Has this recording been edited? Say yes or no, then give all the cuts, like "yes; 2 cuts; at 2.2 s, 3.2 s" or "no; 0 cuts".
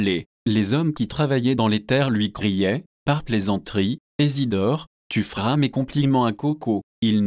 no; 0 cuts